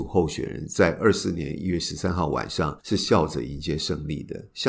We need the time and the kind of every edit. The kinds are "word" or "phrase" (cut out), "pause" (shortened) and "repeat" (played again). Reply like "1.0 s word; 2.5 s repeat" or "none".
2.8 s pause